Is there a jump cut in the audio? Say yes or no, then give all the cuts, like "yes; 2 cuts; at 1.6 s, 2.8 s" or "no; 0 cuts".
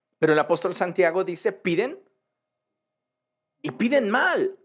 no; 0 cuts